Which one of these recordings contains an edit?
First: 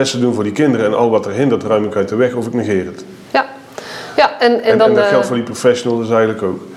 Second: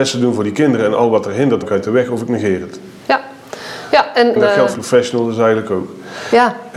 second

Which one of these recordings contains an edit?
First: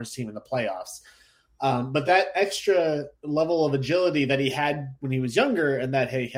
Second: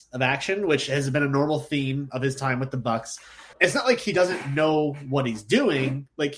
second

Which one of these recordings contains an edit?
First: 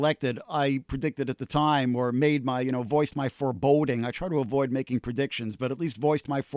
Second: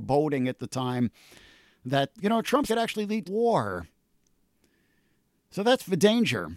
second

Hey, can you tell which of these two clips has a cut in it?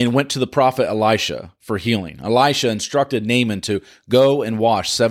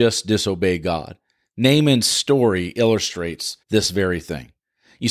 second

